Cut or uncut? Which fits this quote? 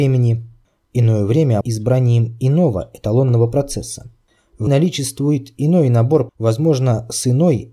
cut